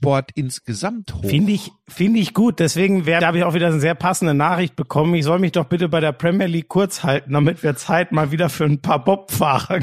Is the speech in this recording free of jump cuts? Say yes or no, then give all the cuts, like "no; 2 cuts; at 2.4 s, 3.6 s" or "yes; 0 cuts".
no; 1 cut; at 3.2 s